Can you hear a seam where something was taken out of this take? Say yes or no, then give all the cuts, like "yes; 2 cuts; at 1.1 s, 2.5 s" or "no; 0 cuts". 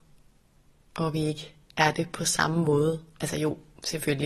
no; 0 cuts